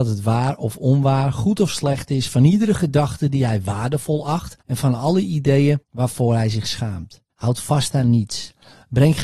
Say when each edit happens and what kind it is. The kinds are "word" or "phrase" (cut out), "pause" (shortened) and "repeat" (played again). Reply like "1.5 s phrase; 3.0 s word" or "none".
4.6 s pause; 5.8 s pause; 7.3 s pause